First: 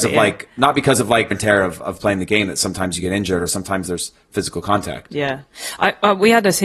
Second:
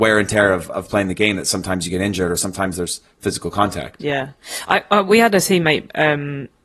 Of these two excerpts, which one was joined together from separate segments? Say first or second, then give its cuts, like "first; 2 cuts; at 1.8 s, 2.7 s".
first; 1 cut; at 1.3 s